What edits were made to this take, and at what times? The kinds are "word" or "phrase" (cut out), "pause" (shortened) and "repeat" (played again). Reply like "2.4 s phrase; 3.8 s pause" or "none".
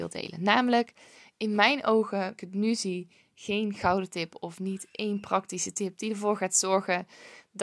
2.4 s phrase